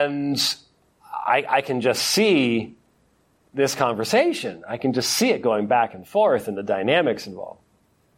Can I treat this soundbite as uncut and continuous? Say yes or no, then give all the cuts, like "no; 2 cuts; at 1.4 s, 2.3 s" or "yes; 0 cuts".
yes; 0 cuts